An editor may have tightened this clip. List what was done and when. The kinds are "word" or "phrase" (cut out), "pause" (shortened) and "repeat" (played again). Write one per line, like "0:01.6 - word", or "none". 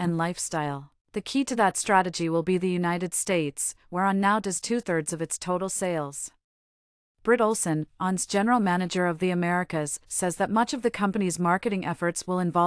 0:01.0 - pause